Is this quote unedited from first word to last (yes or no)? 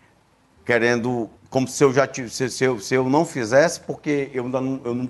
no